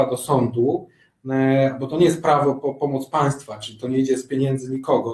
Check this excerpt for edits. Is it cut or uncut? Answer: uncut